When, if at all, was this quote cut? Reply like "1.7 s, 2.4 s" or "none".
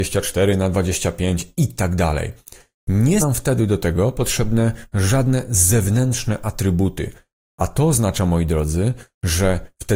3.2 s